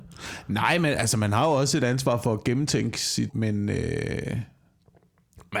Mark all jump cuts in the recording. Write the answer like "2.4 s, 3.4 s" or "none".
3.3 s